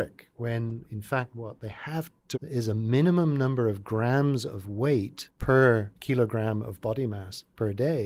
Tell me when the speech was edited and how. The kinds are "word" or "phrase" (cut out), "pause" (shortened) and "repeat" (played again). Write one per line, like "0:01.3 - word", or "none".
0:02.3 - word

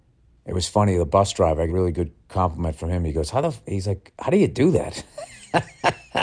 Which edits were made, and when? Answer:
0:01.7 - phrase

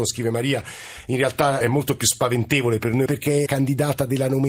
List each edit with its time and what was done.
0:01.6 - word
0:03.1 - word
0:03.5 - word

